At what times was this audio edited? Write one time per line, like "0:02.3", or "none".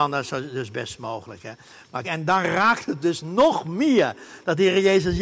0:02.0